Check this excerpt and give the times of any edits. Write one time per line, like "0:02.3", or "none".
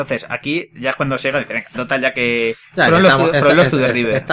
0:01.7